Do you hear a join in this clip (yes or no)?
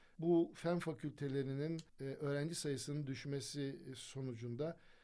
yes